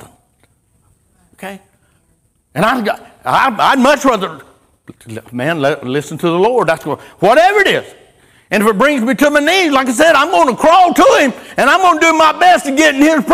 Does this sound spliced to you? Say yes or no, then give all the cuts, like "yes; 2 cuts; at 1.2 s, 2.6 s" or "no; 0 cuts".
no; 0 cuts